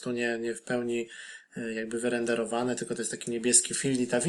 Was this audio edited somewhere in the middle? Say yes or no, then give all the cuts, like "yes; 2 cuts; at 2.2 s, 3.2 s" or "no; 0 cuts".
no; 0 cuts